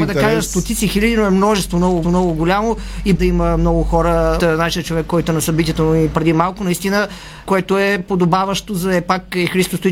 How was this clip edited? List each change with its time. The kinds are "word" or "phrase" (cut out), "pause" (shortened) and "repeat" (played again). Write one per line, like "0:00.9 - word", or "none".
0:02.0 - repeat
0:03.2 - word
0:04.4 - word
0:06.1 - word
0:07.4 - word